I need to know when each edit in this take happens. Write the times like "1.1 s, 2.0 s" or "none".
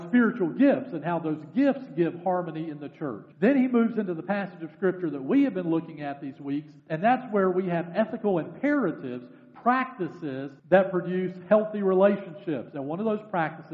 3.3 s, 6.8 s, 10.6 s

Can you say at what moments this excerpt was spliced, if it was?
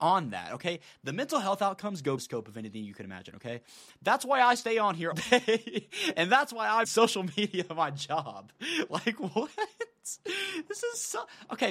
2.2 s, 5.1 s, 6.8 s

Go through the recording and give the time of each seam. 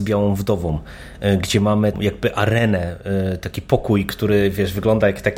1.9 s

